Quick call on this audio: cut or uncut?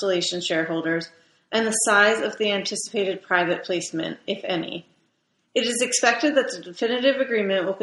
uncut